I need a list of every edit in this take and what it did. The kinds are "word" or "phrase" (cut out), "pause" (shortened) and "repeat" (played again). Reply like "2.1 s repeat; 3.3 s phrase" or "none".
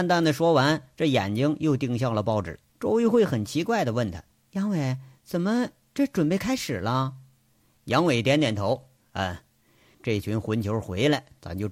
2.7 s pause; 4.3 s pause; 9.9 s phrase